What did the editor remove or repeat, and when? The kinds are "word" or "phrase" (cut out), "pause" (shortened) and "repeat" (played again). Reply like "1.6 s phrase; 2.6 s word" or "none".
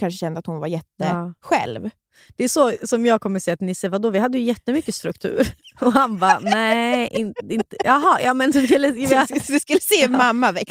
none